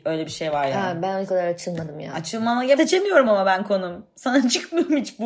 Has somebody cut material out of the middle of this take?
yes; 2 cuts; at 1.3 s, 2.8 s

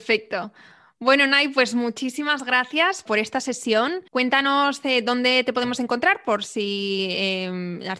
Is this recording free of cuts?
no; 2 cuts; at 3.1 s, 4.1 s

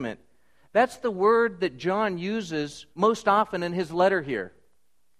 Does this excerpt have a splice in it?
yes; 1 cut; at 2.9 s

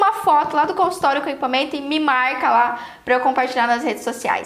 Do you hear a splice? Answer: no; 0 cuts

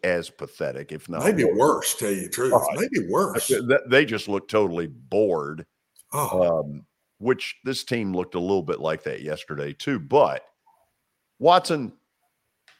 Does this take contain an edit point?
no; 0 cuts

